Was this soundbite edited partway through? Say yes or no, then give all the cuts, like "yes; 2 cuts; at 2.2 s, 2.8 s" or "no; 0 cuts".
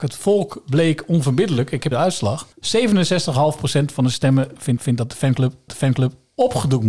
yes; 4 cuts; at 1.9 s, 2.5 s, 4.8 s, 5.7 s